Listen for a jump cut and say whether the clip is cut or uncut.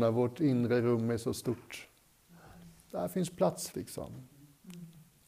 cut